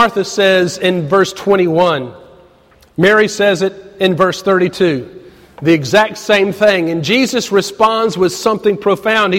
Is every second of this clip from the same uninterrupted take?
yes; 0 cuts

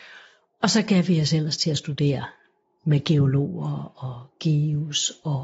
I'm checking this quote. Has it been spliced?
no; 0 cuts

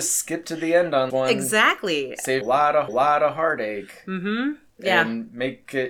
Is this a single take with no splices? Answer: no; 4 cuts; at 1.1 s, 2.4 s, 2.9 s, 4.7 s

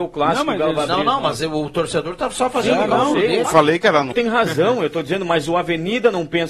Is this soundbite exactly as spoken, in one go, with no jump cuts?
no; 2 cuts; at 3.4 s, 4.1 s

